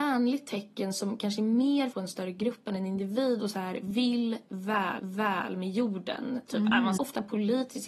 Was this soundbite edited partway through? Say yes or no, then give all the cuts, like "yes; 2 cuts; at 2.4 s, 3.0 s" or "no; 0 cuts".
yes; 4 cuts; at 1.9 s, 3.5 s, 5.0 s, 7.0 s